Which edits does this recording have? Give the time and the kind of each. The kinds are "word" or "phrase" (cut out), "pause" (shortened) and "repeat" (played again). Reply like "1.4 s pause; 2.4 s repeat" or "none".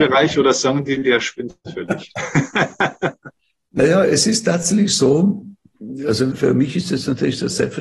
6.3 s word